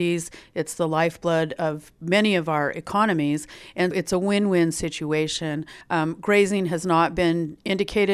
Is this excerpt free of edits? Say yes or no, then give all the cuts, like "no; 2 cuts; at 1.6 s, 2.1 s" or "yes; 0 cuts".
no; 2 cuts; at 3.9 s, 5.8 s